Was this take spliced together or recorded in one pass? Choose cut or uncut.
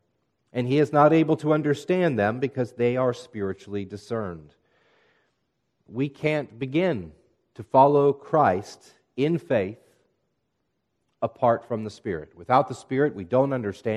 uncut